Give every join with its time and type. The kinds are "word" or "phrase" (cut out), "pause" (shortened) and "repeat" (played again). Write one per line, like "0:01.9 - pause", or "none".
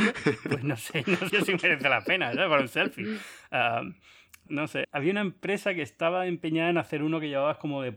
0:01.3 - word
0:04.5 - word
0:04.8 - word